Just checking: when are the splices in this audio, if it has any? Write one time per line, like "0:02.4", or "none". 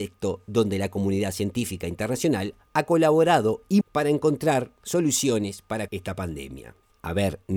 0:03.8
0:05.9